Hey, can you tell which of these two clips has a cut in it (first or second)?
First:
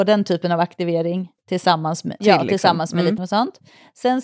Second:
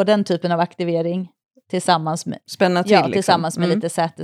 first